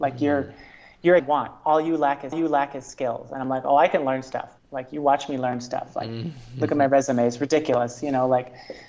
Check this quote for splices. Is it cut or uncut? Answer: cut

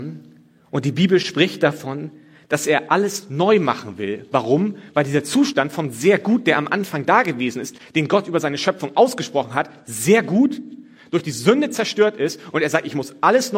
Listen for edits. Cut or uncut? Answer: uncut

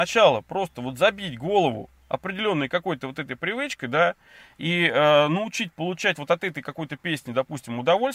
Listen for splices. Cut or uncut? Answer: uncut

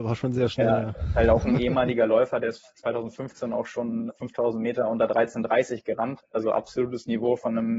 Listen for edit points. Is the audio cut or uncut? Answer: cut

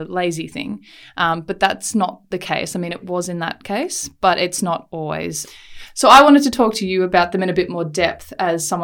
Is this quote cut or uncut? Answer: cut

